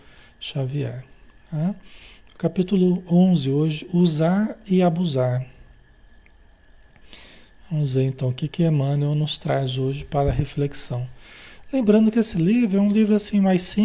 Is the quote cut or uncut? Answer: uncut